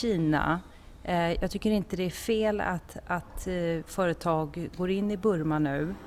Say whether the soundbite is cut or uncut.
uncut